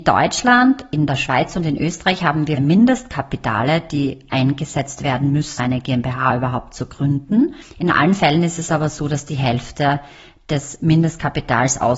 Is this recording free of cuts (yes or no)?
no